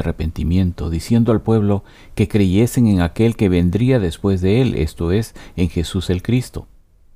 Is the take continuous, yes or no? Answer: yes